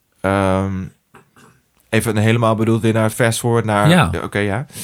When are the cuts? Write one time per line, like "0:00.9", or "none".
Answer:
none